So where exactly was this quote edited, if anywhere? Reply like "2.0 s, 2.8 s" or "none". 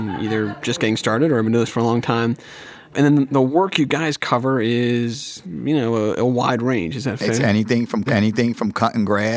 8.1 s